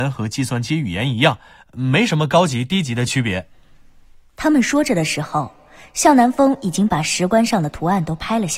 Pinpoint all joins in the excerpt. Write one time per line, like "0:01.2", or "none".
none